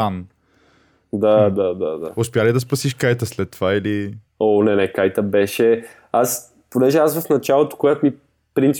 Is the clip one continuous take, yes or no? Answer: no